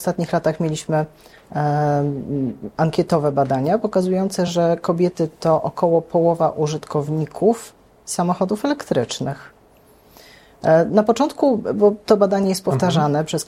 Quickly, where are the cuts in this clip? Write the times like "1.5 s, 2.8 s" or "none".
none